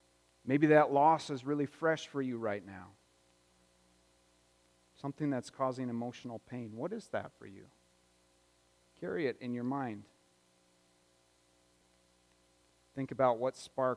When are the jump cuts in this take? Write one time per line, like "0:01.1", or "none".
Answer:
none

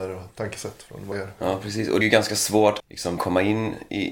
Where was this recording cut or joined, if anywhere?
0:01.1
0:02.0
0:02.8
0:03.2

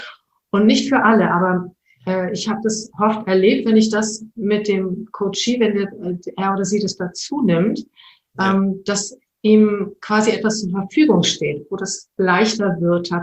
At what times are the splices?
none

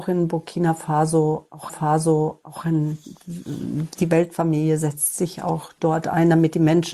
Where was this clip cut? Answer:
0:01.7

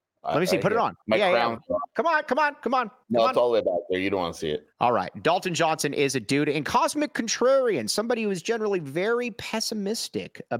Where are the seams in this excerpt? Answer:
0:01.0
0:03.0
0:04.7

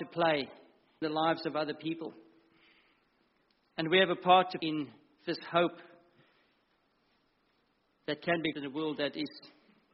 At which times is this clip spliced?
0:01.0
0:04.6
0:08.5

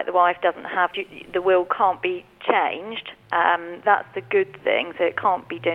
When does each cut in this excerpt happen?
0:00.9
0:03.8

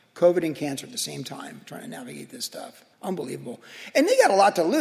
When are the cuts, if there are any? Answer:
0:02.9

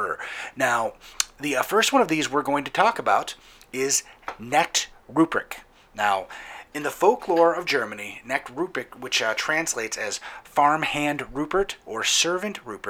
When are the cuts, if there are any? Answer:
none

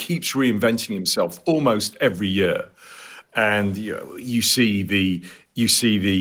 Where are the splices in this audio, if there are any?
none

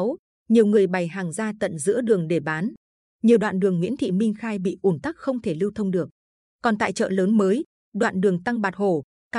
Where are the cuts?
none

